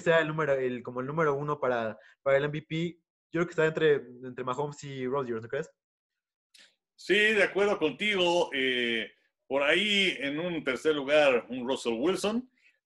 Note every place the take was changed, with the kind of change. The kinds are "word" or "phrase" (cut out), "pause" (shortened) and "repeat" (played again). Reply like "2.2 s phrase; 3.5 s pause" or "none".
none